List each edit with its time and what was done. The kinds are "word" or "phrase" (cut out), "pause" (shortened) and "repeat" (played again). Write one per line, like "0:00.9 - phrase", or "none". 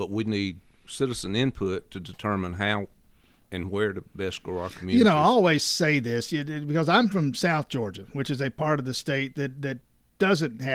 none